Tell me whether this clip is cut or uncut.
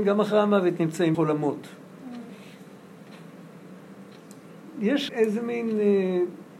cut